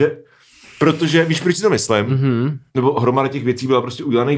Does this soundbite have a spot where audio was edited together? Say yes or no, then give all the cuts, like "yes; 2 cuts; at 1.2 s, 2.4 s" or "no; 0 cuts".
yes; 1 cut; at 2.7 s